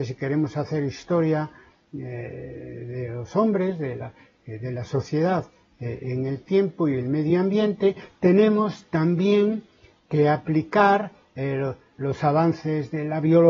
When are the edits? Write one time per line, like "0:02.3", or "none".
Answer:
none

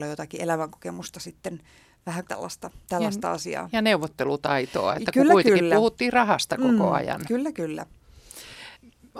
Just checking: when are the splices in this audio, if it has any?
0:02.2
0:02.8

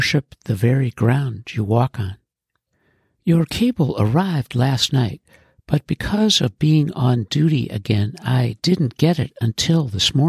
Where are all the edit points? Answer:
none

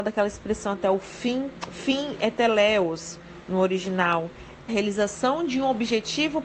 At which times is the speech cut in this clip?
0:04.7

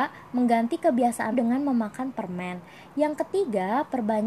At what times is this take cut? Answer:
0:01.3

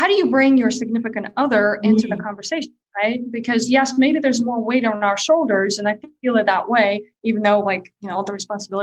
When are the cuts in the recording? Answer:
none

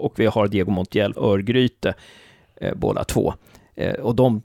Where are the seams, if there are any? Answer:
0:01.1

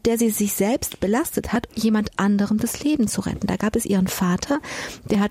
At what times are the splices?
0:01.7

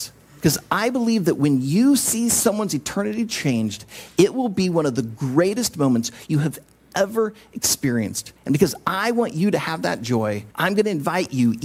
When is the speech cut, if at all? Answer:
0:08.4
0:10.5

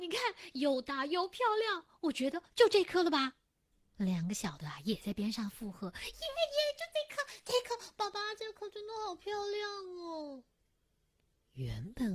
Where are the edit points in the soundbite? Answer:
none

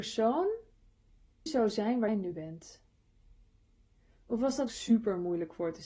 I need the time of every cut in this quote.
0:01.5
0:02.1
0:04.7

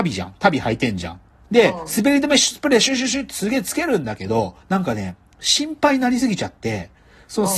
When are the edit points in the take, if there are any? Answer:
0:04.6

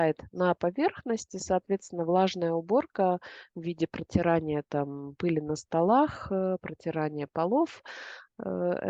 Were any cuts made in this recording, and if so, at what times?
none

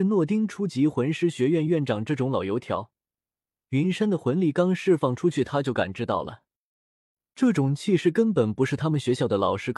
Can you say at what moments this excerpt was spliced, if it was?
none

